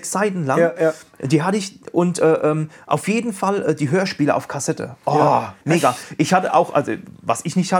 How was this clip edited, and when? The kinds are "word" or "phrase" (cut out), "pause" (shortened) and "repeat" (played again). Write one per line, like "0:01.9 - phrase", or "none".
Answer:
0:05.6 - pause